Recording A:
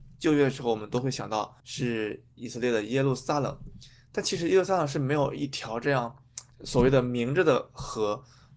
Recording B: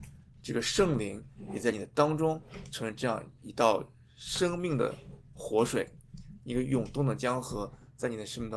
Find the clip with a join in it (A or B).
A